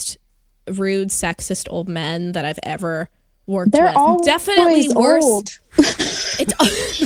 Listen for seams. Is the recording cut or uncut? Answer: uncut